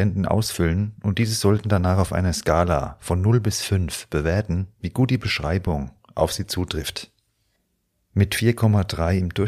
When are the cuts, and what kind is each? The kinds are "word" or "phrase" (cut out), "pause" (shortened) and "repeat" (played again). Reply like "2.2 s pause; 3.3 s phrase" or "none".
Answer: none